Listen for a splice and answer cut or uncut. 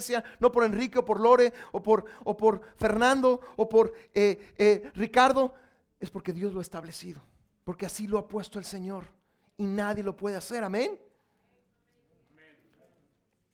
uncut